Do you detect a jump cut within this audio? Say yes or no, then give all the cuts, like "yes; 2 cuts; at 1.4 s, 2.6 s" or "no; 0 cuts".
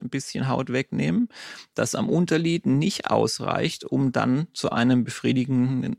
no; 0 cuts